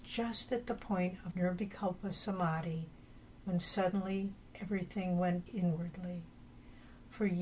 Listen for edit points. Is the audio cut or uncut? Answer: cut